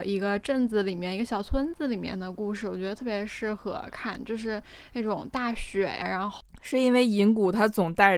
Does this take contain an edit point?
yes; 1 cut; at 6.0 s

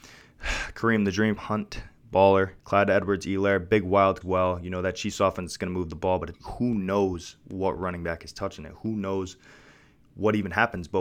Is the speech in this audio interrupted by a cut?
yes; 4 cuts; at 1.4 s, 2.6 s, 4.2 s, 6.3 s

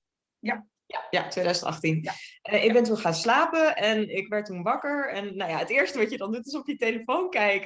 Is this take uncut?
yes; 0 cuts

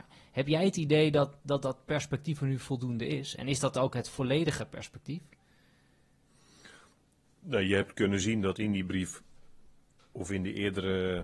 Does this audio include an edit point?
no; 0 cuts

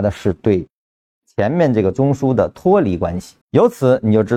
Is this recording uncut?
no; 1 cut; at 3.4 s

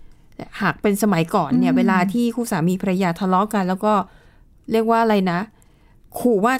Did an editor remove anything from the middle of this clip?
no; 0 cuts

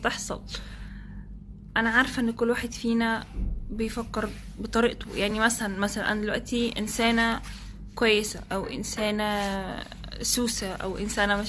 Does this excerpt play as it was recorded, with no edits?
yes; 0 cuts

